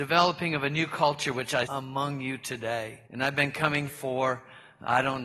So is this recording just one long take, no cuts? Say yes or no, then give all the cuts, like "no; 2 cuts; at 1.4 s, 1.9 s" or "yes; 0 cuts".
no; 3 cuts; at 1.7 s, 3.1 s, 3.9 s